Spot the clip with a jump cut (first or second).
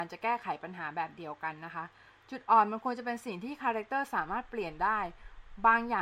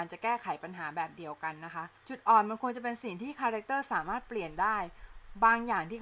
second